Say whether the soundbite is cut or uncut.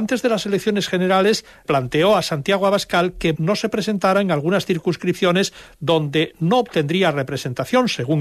cut